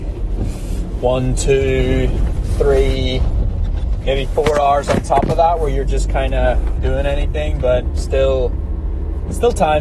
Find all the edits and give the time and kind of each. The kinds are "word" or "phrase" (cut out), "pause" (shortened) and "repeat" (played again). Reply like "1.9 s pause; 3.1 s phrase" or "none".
6.8 s phrase